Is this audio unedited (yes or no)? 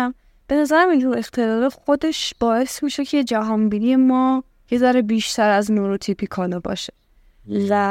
yes